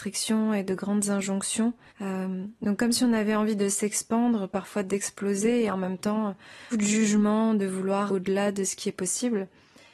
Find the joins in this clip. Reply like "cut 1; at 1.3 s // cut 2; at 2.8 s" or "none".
cut 1; at 1.9 s // cut 2; at 6.7 s // cut 3; at 8.1 s